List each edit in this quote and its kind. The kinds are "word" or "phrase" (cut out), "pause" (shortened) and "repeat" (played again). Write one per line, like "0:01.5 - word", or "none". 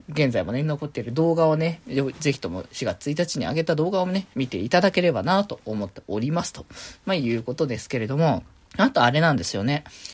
0:04.3 - pause
0:08.6 - pause